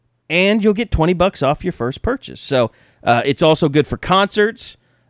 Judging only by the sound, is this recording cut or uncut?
uncut